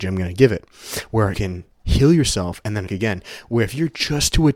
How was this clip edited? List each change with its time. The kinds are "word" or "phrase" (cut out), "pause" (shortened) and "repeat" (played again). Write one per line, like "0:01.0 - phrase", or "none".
0:01.3 - word
0:01.7 - word
0:02.9 - word